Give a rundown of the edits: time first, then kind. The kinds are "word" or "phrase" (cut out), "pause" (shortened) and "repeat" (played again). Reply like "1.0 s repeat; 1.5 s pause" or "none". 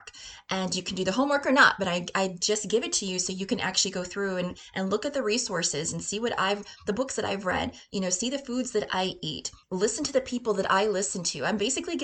9.6 s pause